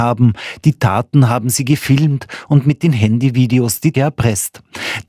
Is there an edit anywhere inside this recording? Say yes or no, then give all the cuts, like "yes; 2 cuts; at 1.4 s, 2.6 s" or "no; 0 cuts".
yes; 1 cut; at 3.9 s